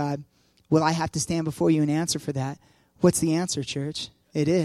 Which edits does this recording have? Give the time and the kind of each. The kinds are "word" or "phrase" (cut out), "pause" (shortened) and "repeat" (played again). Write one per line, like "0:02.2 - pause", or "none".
none